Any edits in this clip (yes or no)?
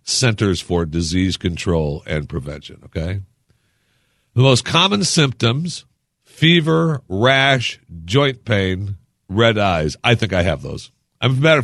no